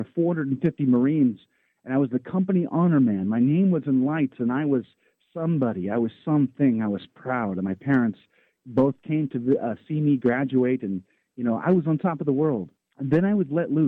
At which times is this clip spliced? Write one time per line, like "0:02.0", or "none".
none